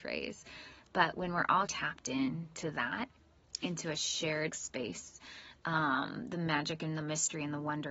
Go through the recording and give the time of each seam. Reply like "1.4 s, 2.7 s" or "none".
1.7 s, 4.5 s